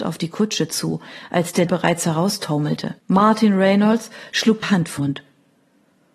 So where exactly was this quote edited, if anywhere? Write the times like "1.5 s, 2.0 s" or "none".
1.7 s, 3.0 s, 4.6 s, 5.0 s

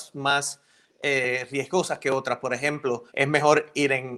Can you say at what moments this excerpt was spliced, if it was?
3.1 s

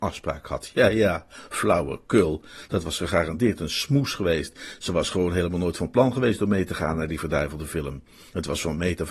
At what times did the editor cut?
none

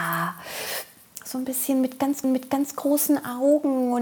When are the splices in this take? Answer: 2.2 s

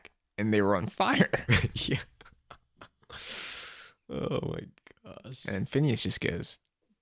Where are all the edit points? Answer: none

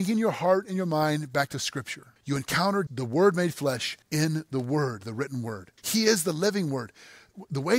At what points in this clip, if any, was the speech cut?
2.2 s, 2.9 s, 4.0 s, 5.8 s

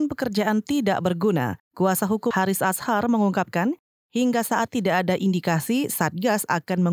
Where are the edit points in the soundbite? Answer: 1.6 s, 2.3 s, 4.7 s

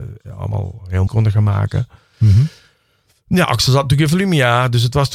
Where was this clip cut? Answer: 1.1 s, 3.4 s

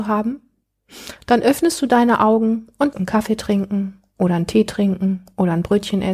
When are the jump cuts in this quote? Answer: 2.9 s

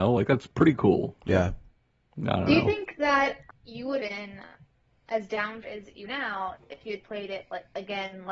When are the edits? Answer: 3.5 s, 4.0 s, 5.6 s, 6.0 s

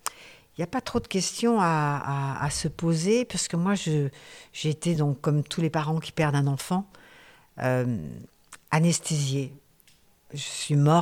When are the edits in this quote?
none

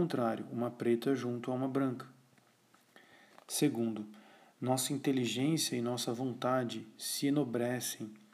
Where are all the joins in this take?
none

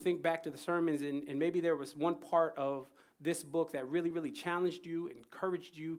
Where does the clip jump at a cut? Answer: none

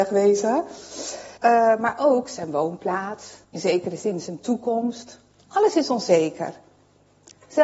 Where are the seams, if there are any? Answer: 1.4 s, 3.4 s, 5.3 s

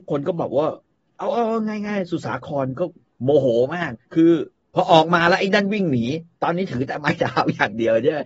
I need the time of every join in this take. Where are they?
4.0 s

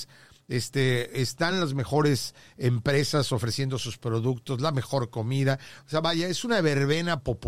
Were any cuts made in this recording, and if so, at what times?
none

